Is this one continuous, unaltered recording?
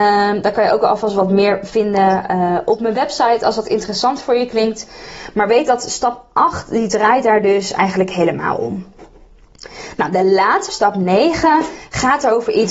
no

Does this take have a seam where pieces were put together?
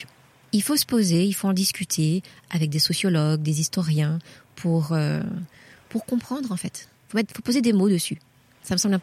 no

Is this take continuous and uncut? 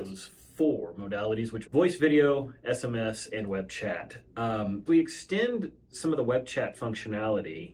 no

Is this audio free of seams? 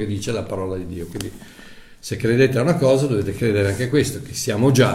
yes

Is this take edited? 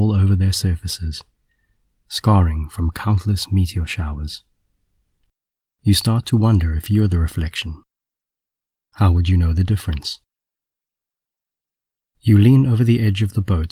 no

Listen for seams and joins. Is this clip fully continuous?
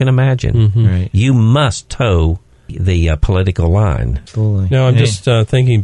yes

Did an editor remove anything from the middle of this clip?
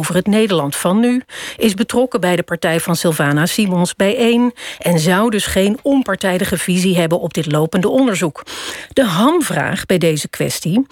no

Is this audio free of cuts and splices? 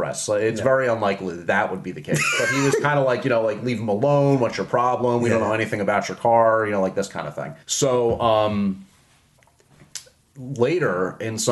no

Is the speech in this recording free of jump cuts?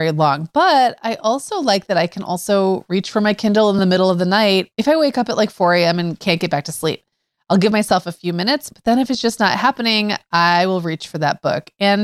yes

